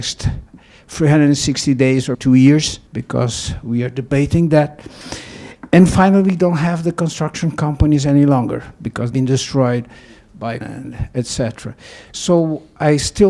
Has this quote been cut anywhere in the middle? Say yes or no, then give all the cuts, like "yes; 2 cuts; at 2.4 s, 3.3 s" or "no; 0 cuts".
yes; 4 cuts; at 2.1 s, 2.9 s, 9.1 s, 10.6 s